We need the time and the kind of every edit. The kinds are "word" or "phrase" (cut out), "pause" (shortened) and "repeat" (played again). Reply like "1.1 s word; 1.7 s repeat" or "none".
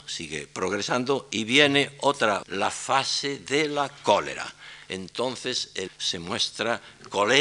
2.4 s word; 5.9 s word